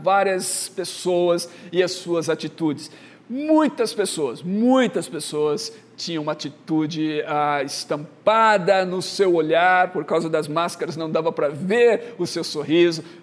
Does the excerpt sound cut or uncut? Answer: uncut